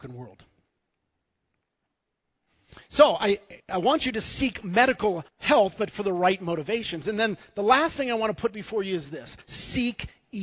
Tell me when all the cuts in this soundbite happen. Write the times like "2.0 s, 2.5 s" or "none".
3.6 s, 5.3 s, 9.4 s